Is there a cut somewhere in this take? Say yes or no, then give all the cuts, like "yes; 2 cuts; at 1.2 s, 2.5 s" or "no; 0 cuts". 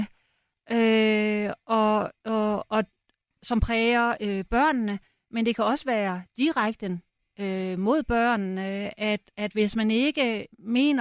no; 0 cuts